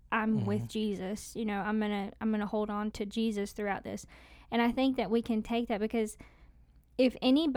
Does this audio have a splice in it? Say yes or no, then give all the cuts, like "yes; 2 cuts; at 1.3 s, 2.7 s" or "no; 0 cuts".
yes; 1 cut; at 2.9 s